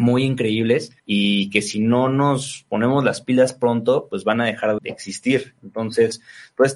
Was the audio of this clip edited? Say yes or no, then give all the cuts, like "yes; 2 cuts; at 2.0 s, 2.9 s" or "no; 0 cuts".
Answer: yes; 2 cuts; at 1.0 s, 4.8 s